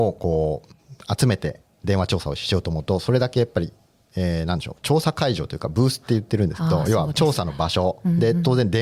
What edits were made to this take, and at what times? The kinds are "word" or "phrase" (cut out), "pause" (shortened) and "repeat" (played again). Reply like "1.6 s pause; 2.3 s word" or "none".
none

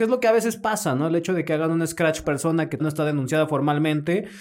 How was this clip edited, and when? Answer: 2.2 s phrase; 2.8 s word

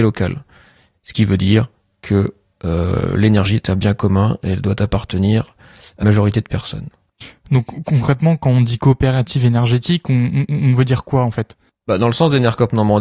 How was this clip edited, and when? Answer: 6.0 s word

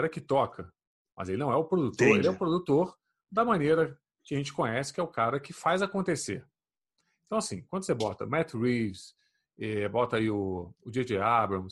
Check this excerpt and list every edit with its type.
none

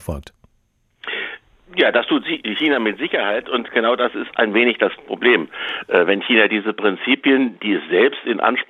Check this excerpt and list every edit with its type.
none

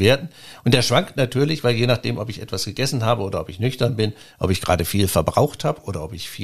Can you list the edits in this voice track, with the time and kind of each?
none

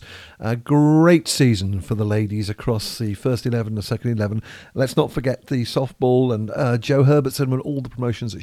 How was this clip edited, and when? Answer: none

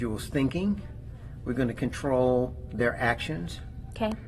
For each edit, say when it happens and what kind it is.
none

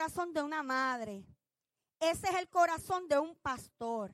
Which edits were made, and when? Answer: none

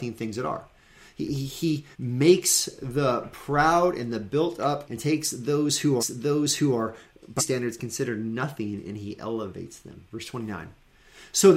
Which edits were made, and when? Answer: 1.9 s pause; 4.9 s phrase; 6.0 s repeat; 7.4 s word; 10.1 s pause

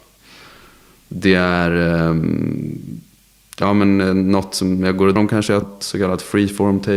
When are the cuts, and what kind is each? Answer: 5.2 s word; 5.6 s word

